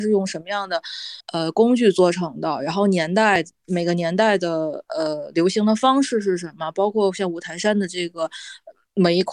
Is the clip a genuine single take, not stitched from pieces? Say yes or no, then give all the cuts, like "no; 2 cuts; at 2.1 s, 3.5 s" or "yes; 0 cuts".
no; 1 cut; at 1.2 s